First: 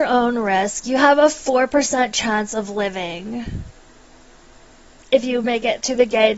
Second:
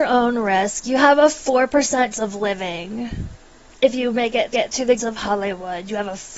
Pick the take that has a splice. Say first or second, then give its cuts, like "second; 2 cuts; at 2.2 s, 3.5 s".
second; 4 cuts; at 2.1 s, 3.7 s, 4.5 s, 5.0 s